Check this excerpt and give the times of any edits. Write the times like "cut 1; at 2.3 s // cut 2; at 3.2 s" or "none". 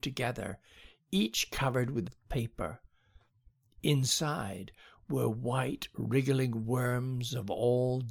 cut 1; at 2.0 s